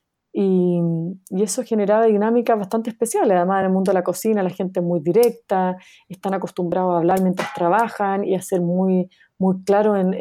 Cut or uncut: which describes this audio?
uncut